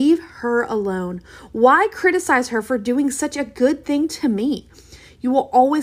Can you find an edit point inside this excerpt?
no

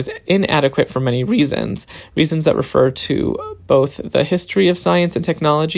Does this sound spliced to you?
no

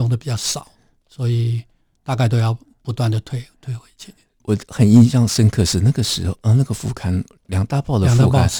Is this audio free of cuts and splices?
yes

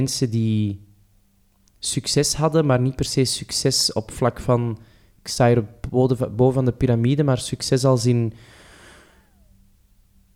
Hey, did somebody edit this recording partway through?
no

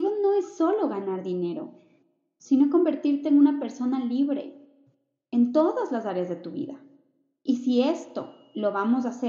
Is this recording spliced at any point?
no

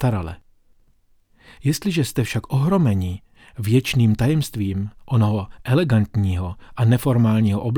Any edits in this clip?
no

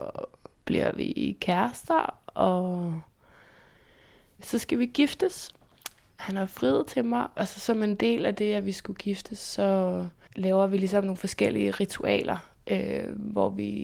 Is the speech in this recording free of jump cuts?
yes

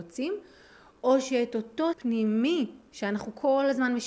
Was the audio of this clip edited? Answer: yes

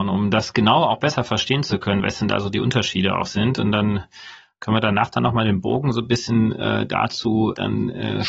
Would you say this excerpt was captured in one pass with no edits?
yes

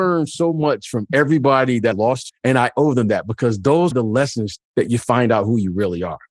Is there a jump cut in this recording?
yes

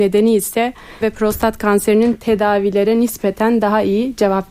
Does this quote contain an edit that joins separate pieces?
yes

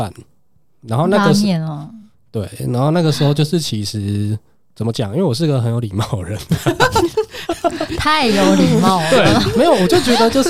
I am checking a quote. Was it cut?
no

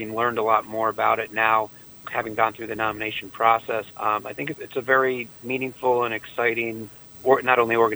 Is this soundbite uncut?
no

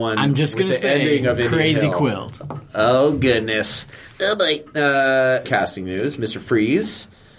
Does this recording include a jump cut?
yes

